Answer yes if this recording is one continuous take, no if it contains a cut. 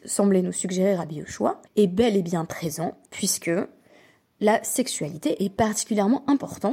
no